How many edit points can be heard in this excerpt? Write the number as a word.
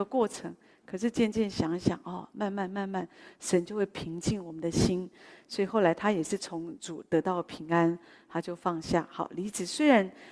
zero